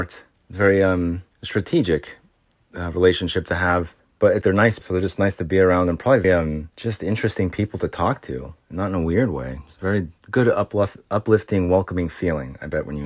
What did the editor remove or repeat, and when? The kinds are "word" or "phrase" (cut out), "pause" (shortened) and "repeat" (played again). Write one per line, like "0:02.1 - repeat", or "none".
0:01.3 - pause
0:04.0 - pause
0:04.4 - phrase
0:04.8 - phrase
0:06.2 - word
0:06.7 - pause
0:10.2 - pause